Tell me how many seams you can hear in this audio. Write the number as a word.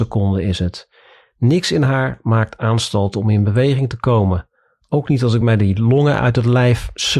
zero